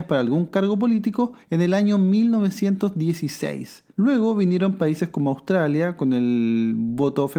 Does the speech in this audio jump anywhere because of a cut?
yes; 2 cuts; at 1.4 s, 3.9 s

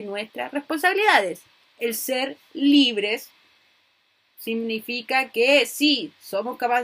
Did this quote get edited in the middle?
no; 0 cuts

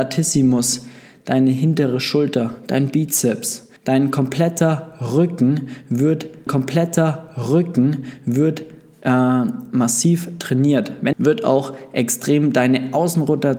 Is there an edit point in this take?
yes; 3 cuts; at 3.8 s, 6.5 s, 11.1 s

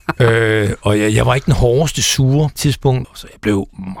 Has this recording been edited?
yes; 2 cuts; at 2.6 s, 3.0 s

